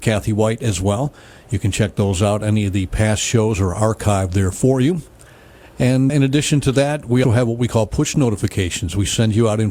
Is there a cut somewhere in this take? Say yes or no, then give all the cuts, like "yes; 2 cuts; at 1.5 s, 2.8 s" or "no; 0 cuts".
yes; 2 cuts; at 6.1 s, 7.2 s